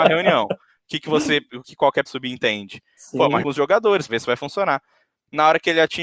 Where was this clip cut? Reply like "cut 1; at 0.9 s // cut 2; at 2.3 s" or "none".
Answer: cut 1; at 1.6 s // cut 2; at 2.1 s // cut 3; at 3.4 s // cut 4; at 4.1 s